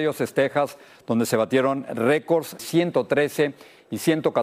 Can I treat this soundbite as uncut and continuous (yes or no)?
no